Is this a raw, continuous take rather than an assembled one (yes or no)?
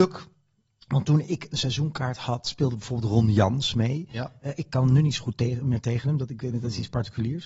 yes